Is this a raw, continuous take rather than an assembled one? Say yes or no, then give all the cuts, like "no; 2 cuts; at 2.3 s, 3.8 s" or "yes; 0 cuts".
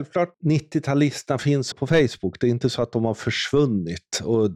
no; 1 cut; at 1.7 s